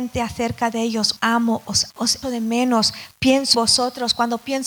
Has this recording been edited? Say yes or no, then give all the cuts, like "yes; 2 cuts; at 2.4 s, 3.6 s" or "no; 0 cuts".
yes; 4 cuts; at 1.2 s, 1.9 s, 2.2 s, 3.5 s